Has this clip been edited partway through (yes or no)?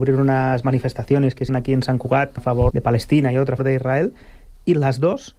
yes